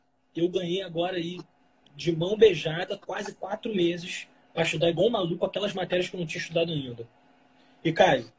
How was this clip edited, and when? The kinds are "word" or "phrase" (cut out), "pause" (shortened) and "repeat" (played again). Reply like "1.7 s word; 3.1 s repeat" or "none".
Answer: none